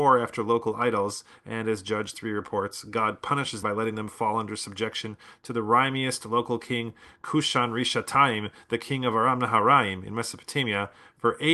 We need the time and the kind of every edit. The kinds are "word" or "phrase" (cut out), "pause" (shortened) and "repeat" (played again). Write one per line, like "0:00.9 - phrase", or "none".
0:03.6 - word